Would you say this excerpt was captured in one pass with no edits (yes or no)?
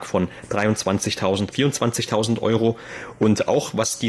no